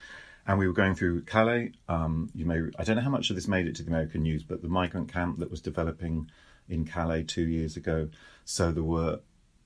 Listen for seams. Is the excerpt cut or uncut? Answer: uncut